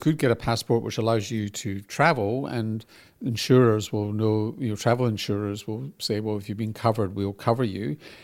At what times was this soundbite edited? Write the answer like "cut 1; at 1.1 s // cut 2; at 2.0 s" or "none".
none